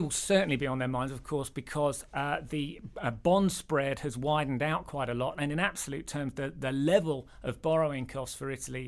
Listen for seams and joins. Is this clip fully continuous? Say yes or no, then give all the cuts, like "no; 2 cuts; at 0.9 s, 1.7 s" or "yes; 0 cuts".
yes; 0 cuts